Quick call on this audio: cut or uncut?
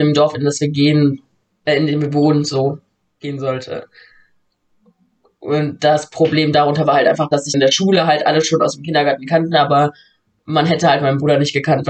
cut